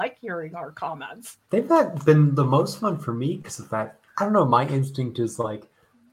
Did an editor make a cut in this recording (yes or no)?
yes